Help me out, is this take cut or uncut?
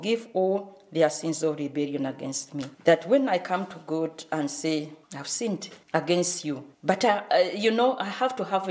cut